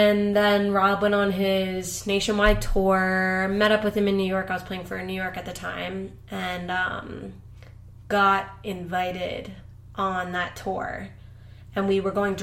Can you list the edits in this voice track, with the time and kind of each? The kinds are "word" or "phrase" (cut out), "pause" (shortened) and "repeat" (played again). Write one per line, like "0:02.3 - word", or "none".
none